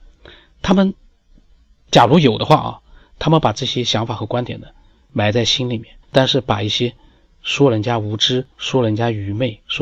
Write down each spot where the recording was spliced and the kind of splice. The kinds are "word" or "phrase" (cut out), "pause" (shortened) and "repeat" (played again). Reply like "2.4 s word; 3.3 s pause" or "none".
6.0 s pause; 8.5 s pause